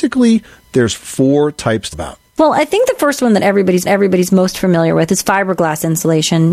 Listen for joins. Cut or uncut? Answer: cut